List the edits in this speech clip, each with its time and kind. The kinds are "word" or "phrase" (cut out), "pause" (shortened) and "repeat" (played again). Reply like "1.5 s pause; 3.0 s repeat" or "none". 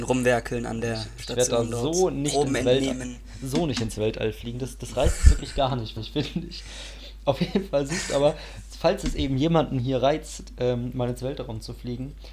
6.0 s repeat